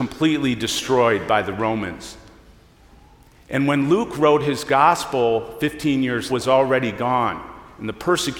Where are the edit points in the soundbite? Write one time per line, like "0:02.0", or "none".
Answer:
0:06.3